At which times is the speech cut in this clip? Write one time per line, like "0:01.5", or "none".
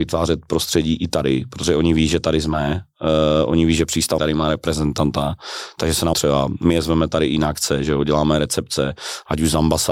0:04.2
0:06.1